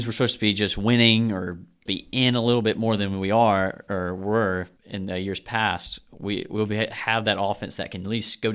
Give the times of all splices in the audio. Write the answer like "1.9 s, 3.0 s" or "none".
1.9 s, 4.8 s